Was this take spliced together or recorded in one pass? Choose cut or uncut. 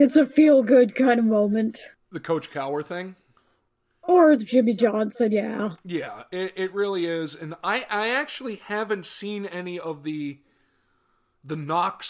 uncut